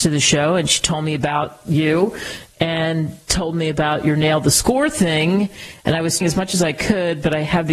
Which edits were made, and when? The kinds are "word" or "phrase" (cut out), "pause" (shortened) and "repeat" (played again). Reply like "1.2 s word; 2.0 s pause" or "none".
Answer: 6.2 s word